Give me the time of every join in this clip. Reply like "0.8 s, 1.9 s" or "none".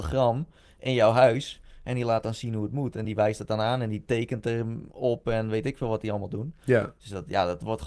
none